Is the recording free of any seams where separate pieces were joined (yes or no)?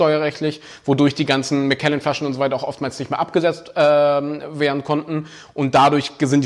yes